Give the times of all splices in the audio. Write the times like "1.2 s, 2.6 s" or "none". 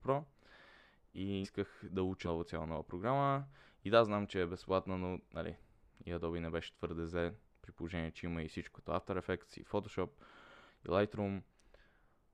1.4 s, 2.2 s, 8.7 s

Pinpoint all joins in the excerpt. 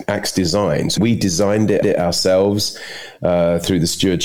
1.0 s, 1.8 s

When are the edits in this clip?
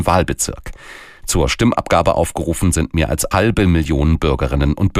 3.3 s

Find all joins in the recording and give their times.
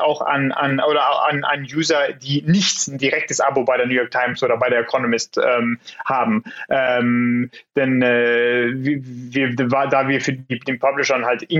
none

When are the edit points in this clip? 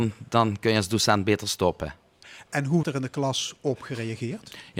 2.8 s

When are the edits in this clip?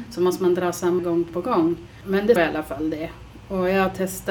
1.0 s, 1.3 s, 2.4 s

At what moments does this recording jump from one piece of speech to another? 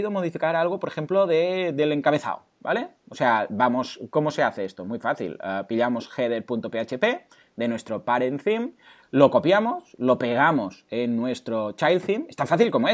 none

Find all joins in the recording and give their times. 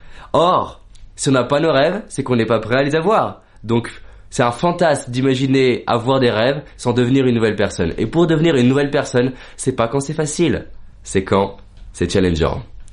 10.9 s

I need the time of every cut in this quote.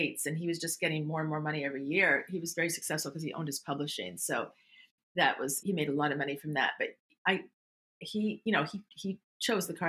2.5 s, 5.6 s

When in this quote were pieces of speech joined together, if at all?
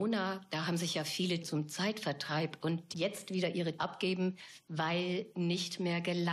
1.4 s, 2.6 s, 2.9 s, 3.8 s, 5.3 s

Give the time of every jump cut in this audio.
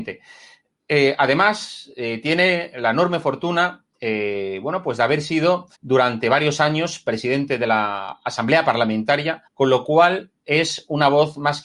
3.9 s, 5.7 s, 9.5 s

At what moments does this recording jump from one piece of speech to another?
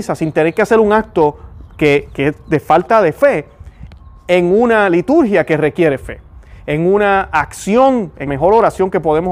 8.3 s

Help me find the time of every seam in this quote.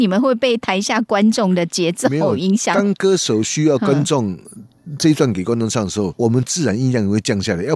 6.1 s

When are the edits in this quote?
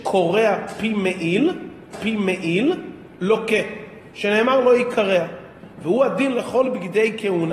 1.9 s

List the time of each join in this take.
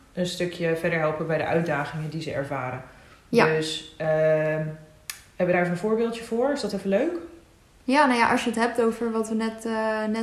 none

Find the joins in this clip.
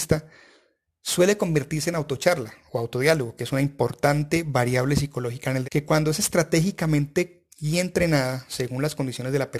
5.6 s, 7.5 s

